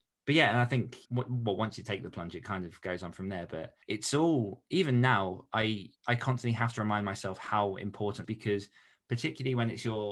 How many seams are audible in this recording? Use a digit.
4